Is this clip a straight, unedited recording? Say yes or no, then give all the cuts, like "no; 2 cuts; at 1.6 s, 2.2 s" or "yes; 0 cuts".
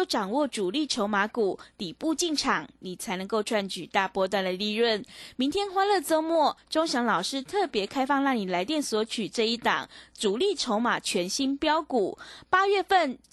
yes; 0 cuts